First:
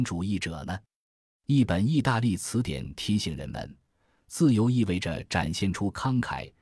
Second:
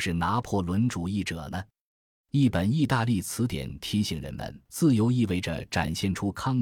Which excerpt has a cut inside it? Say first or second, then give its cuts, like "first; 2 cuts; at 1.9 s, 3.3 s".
second; 1 cut; at 4.7 s